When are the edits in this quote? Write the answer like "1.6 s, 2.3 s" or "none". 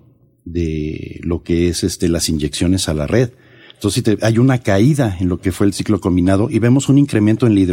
none